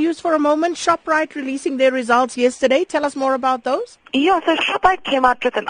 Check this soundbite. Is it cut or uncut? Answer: cut